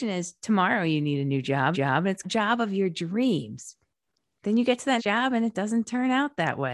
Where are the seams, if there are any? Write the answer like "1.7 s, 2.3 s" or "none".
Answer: 1.7 s, 2.2 s, 4.1 s, 5.0 s